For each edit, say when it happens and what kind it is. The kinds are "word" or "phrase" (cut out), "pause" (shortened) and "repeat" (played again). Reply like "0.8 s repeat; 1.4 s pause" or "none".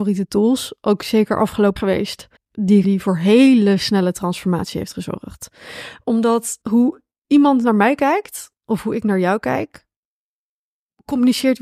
1.8 s word; 2.4 s pause; 2.8 s phrase; 6.6 s pause